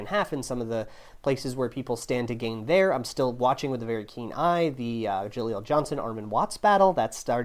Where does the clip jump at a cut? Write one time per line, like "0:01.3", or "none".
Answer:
none